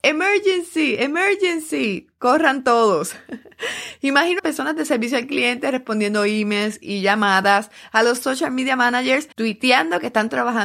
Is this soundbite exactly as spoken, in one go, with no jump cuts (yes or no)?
no